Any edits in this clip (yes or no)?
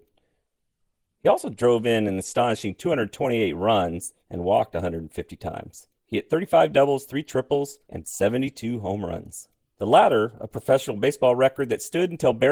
yes